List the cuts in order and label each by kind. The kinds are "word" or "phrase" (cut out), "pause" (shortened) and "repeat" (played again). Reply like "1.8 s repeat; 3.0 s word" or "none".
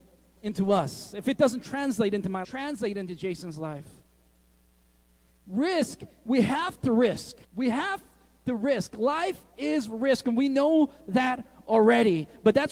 2.4 s phrase; 7.4 s pause